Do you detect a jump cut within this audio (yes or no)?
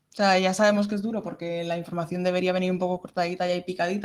no